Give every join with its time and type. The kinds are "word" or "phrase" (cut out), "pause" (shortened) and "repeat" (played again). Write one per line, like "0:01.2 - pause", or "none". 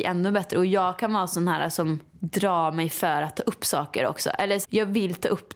0:02.1 - pause
0:04.6 - word